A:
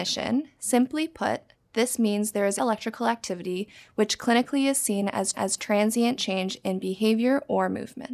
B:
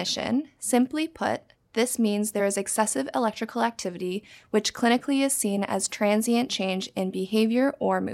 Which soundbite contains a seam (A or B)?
A